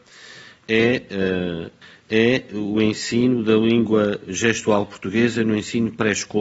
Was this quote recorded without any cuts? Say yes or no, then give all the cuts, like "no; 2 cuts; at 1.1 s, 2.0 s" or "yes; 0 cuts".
yes; 0 cuts